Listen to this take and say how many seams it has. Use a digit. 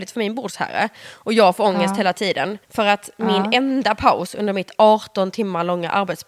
1